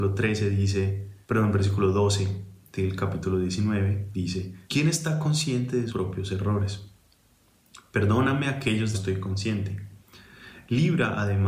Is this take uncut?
no; 4 cuts; at 1.2 s, 4.6 s, 5.9 s, 8.9 s

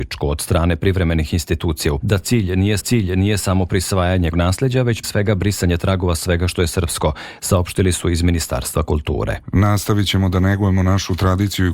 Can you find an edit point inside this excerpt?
yes; 4 cuts; at 2.0 s, 2.8 s, 4.3 s, 5.0 s

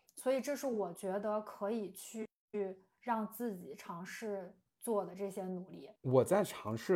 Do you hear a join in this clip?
yes; 1 cut; at 6.0 s

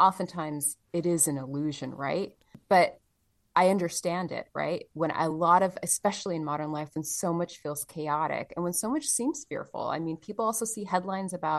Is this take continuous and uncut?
yes; 0 cuts

